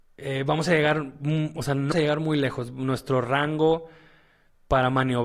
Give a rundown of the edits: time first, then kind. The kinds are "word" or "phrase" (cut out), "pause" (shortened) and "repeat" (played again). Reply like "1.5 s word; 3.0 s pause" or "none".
1.9 s word